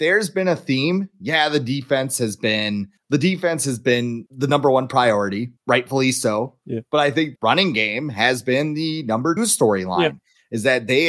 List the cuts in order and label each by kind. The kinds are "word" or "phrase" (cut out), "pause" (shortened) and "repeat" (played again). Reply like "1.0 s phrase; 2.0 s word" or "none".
3.0 s word; 5.6 s pause; 7.4 s word; 9.4 s word